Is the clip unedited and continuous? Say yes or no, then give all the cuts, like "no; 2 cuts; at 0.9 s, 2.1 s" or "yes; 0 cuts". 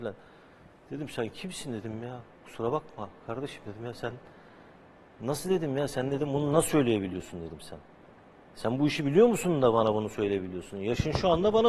yes; 0 cuts